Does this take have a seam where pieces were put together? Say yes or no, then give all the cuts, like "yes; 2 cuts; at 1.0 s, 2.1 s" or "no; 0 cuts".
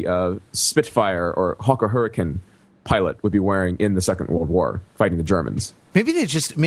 no; 0 cuts